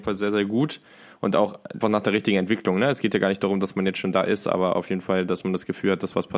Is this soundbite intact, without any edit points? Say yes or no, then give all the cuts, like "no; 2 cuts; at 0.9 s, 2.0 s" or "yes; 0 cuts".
no; 1 cut; at 1.8 s